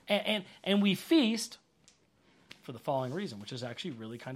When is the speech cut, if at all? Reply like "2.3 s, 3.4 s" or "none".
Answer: none